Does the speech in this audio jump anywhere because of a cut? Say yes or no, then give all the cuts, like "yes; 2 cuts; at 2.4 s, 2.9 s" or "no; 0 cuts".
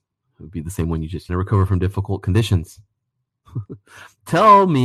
yes; 1 cut; at 1.3 s